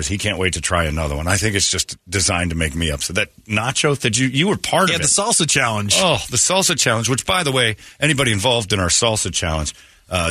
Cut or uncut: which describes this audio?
uncut